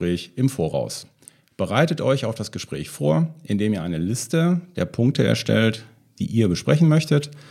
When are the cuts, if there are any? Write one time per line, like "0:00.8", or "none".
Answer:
none